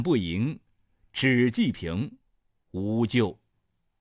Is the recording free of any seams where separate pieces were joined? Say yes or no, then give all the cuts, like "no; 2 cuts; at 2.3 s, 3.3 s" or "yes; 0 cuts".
yes; 0 cuts